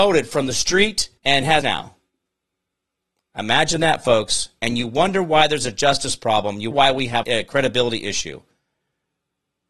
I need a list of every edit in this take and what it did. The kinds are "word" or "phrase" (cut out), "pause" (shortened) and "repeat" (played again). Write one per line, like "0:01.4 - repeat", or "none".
0:01.2 - pause
0:01.6 - word
0:06.7 - word
0:07.2 - word